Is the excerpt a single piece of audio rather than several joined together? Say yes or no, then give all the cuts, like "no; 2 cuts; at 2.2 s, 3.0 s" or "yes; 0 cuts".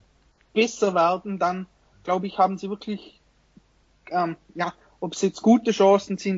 yes; 0 cuts